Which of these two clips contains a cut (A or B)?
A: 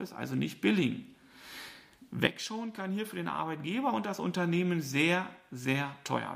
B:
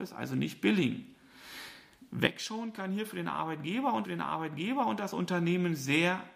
B